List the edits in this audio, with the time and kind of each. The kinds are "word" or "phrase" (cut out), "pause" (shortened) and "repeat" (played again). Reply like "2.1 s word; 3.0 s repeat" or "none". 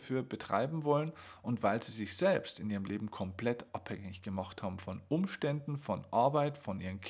none

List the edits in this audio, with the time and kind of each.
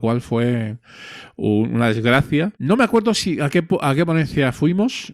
2.5 s pause

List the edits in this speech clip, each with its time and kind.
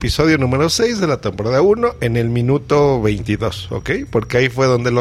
none

